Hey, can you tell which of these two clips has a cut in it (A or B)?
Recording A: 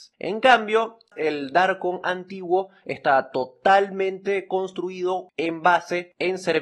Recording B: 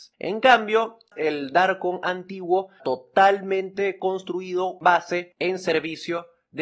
B